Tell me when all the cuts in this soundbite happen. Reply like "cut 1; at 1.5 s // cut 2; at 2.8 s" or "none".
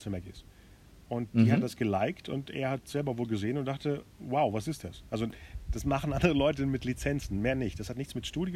none